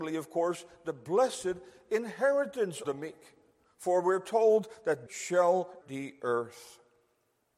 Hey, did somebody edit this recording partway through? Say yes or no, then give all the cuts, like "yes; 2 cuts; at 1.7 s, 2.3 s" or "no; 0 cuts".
yes; 3 cuts; at 2.8 s, 5.1 s, 5.8 s